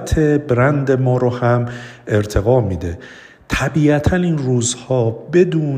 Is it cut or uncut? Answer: uncut